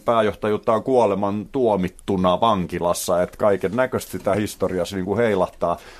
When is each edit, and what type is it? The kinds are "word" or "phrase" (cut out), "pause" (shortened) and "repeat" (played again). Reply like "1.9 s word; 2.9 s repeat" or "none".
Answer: none